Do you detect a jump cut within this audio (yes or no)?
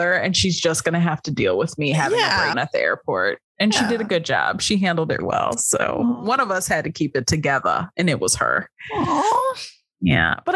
yes